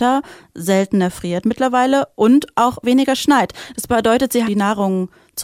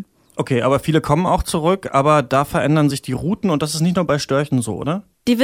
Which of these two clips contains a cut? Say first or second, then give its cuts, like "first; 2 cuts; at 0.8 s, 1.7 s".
first; 1 cut; at 4.4 s